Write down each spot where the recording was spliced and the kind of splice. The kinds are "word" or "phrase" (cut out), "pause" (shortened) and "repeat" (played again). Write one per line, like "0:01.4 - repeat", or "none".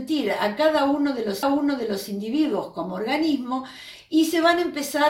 0:01.4 - repeat

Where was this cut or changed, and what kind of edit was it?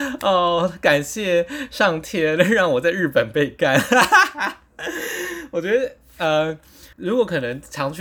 0:06.9 - pause

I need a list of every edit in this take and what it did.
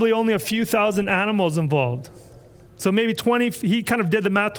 none

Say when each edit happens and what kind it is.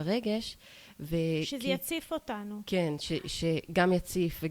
none

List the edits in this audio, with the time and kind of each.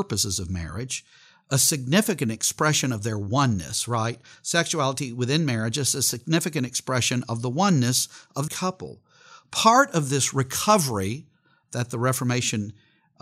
0:08.5 - phrase

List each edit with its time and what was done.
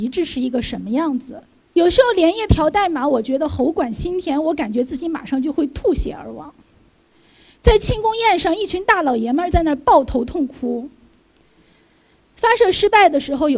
0:01.6 - pause

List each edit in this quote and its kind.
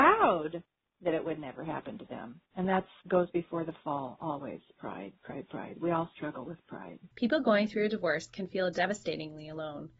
0:02.5 - pause
0:07.1 - pause

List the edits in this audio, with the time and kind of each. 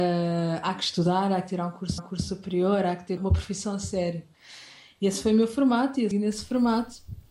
0:02.0 - repeat
0:03.2 - word
0:06.1 - word

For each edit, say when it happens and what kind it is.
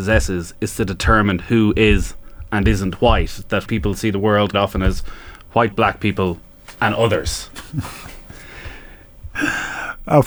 0:03.7 - word
0:04.5 - word
0:05.7 - word

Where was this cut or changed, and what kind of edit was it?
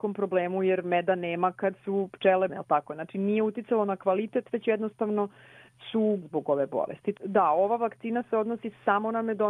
0:02.5 - word
0:06.2 - phrase

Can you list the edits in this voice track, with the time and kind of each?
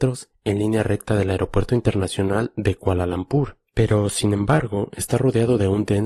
0:03.7 - pause

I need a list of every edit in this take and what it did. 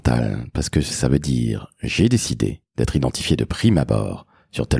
none

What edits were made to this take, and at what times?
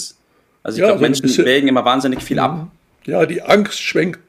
none

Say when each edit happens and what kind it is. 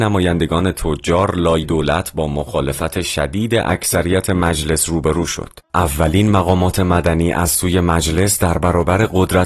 0:01.6 - word

